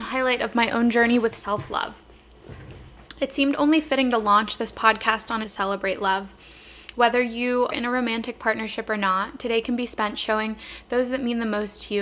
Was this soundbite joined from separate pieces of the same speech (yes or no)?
yes